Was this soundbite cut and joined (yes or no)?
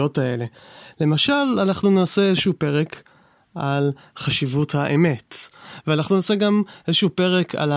no